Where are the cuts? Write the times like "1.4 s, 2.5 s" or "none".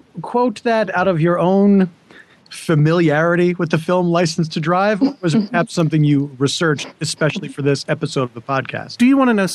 none